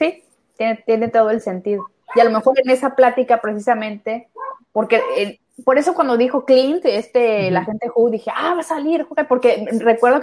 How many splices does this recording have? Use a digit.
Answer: 2